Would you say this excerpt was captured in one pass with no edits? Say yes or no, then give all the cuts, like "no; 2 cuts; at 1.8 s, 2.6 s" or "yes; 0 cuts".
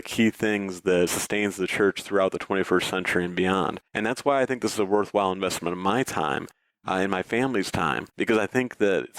no; 3 cuts; at 1.1 s, 3.9 s, 8.1 s